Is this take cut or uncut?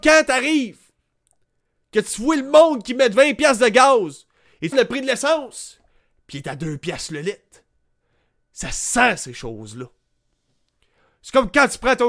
cut